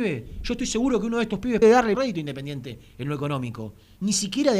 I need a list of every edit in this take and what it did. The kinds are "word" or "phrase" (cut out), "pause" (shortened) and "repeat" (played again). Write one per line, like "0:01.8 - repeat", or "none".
0:01.6 - word
0:01.9 - word

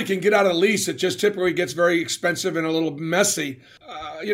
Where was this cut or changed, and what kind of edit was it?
none

